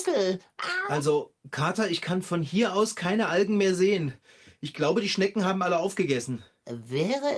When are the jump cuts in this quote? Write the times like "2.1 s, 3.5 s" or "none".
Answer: none